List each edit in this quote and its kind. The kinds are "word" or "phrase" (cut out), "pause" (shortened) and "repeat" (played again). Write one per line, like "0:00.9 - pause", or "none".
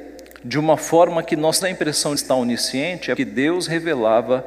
0:01.6 - word
0:02.2 - phrase
0:03.2 - word